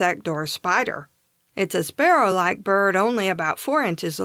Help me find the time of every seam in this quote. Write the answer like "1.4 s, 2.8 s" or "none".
none